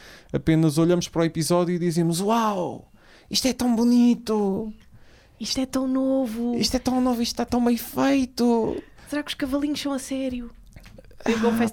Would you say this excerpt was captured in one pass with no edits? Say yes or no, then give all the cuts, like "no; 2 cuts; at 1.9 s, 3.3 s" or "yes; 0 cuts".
yes; 0 cuts